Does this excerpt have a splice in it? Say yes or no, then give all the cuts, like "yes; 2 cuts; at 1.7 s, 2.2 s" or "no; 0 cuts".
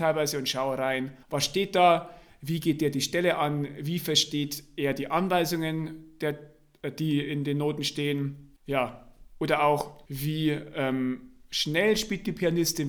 yes; 3 cuts; at 1.2 s, 8.6 s, 10.1 s